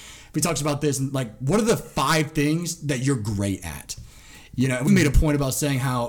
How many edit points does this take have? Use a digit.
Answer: 1